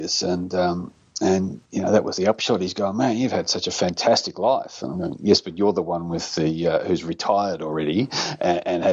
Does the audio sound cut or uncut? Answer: cut